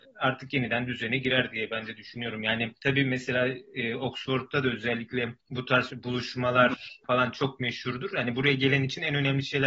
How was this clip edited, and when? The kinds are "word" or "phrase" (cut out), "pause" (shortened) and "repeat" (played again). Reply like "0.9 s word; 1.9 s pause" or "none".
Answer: 2.8 s pause; 5.4 s pause; 5.9 s word

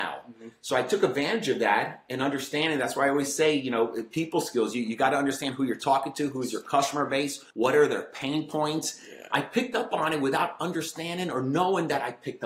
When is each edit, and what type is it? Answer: 7.5 s pause

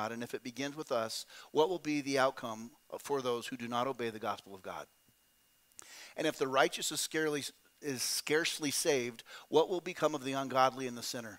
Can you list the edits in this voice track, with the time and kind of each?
none

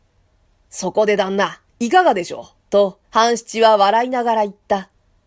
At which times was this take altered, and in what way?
1.7 s pause; 2.6 s pause; 3.0 s pause

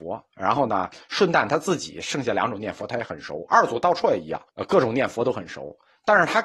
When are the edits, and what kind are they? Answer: 4.5 s pause

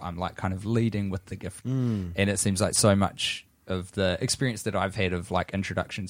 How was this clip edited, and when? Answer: 1.6 s word

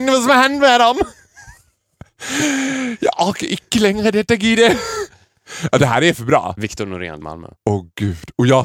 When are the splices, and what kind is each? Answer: 7.2 s word; 7.6 s pause

